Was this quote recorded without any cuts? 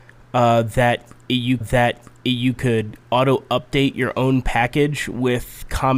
no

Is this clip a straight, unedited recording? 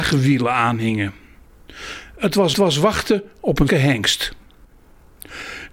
no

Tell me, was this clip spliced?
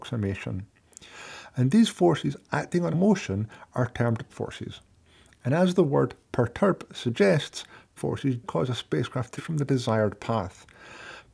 yes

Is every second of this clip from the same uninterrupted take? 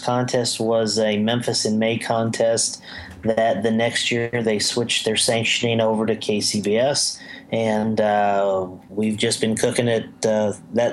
yes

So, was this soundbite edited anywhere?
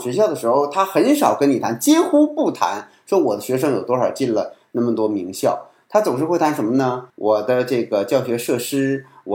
yes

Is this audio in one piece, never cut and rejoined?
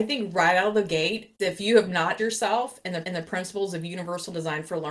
no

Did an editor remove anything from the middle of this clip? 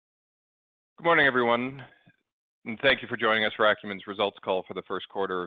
no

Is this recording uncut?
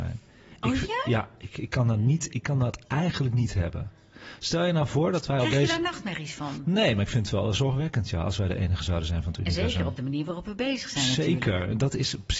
yes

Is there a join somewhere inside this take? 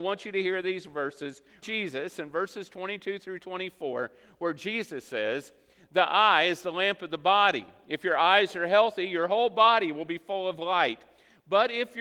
yes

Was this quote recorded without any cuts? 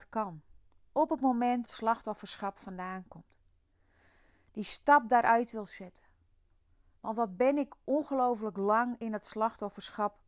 no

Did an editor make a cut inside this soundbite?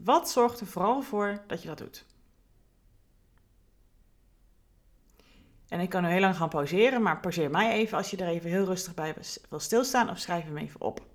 no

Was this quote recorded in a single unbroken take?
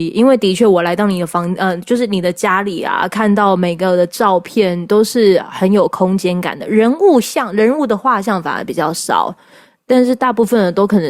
yes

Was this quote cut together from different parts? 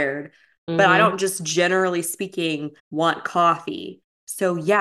yes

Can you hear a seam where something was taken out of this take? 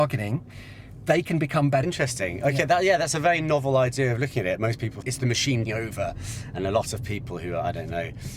yes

